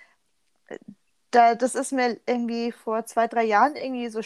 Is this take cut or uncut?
uncut